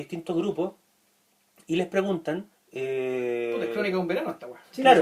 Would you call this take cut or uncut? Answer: cut